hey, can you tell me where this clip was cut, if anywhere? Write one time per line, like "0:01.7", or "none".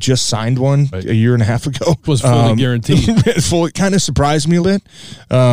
0:00.9
0:02.1
0:03.7
0:04.6